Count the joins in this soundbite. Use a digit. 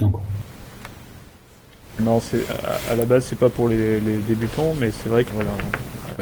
3